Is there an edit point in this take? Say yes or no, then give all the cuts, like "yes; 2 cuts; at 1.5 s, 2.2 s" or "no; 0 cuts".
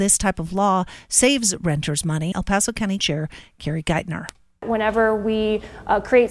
yes; 2 cuts; at 2.3 s, 3.0 s